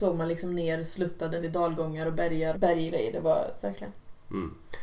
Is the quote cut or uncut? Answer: cut